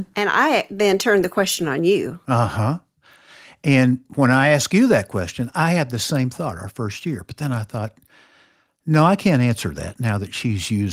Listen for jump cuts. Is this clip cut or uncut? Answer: uncut